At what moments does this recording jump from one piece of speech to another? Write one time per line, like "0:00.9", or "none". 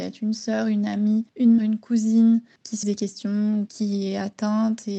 0:01.6
0:02.8
0:03.7